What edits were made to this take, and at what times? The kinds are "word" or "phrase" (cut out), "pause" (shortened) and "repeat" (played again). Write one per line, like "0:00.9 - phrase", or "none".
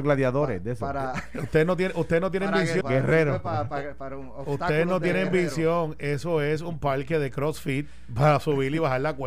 0:02.8 - word